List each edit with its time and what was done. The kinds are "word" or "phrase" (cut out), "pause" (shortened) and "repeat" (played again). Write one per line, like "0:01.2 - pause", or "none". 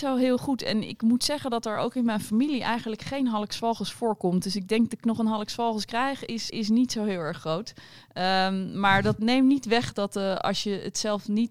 0:05.0 - phrase
0:06.5 - word
0:09.2 - word